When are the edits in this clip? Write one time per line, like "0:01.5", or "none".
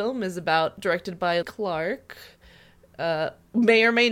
0:01.4